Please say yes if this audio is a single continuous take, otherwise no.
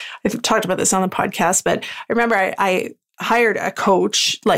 yes